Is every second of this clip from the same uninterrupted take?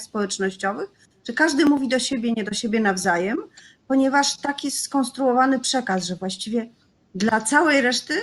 yes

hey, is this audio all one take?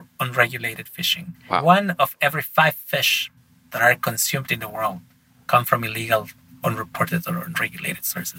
yes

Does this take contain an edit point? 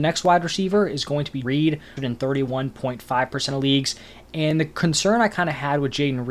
yes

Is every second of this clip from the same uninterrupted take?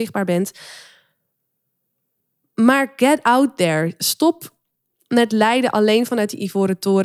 yes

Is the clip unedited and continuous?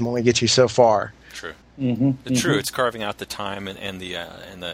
no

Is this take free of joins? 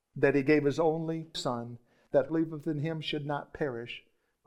no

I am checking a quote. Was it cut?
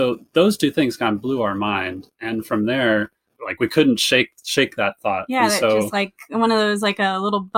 no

